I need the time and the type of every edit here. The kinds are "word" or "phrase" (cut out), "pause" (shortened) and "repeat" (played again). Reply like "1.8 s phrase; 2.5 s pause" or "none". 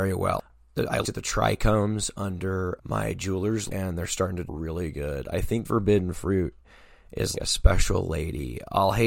1.0 s word; 2.8 s word; 3.7 s word; 4.4 s word; 5.6 s word; 7.3 s word

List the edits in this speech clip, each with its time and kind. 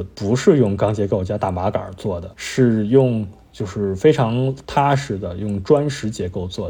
2.3 s pause

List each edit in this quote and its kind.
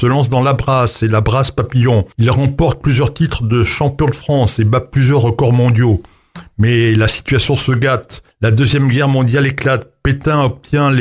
2.1 s pause; 8.3 s pause

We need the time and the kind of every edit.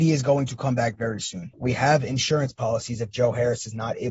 1.5 s pause

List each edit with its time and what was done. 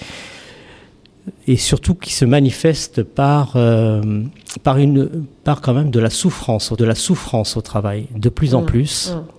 6.8 s repeat

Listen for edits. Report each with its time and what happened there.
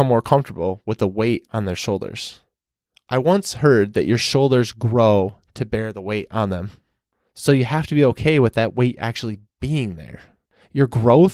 none

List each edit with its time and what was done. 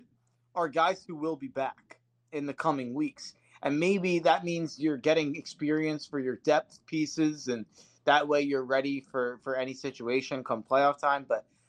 none

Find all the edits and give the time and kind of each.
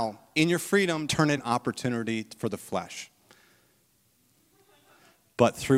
1.1 s word; 1.4 s word

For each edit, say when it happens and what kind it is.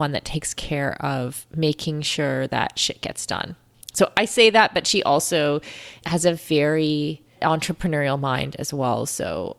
none

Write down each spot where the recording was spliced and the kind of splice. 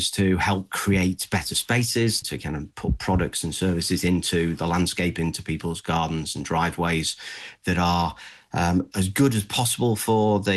2.2 s word; 8.9 s word

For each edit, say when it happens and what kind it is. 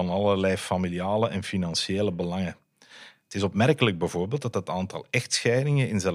none

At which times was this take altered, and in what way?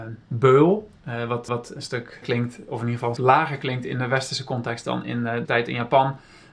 1.5 s repeat; 2.2 s word; 3.2 s word; 5.5 s word

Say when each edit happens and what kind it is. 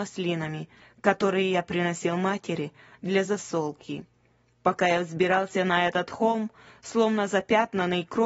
none

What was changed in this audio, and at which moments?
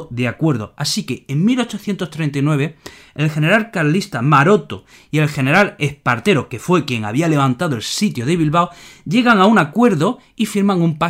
none

